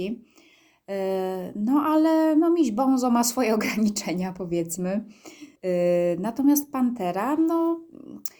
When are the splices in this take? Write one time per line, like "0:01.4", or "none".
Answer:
0:05.6